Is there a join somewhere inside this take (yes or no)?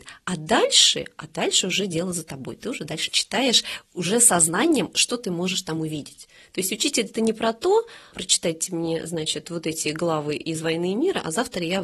no